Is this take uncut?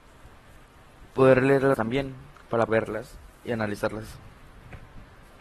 no; 3 cuts; at 1.1 s, 1.7 s, 2.7 s

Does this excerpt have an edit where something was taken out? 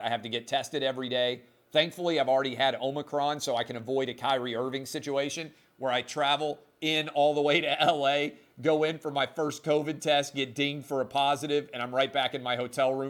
no; 0 cuts

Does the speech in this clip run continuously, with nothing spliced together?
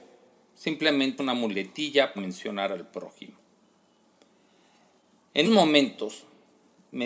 no; 3 cuts; at 1.2 s, 2.2 s, 5.4 s

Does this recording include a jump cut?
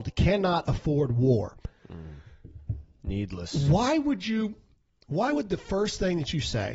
no; 0 cuts

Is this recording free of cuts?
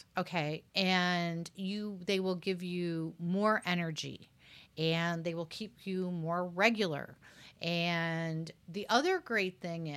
no; 1 cut; at 8.6 s

